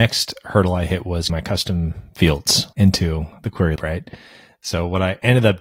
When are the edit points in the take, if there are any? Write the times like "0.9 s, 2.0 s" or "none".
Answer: 1.3 s, 2.7 s, 3.8 s